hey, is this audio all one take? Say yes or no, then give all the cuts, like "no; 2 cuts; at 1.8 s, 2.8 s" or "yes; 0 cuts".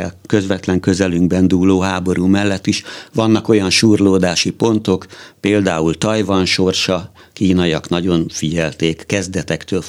yes; 0 cuts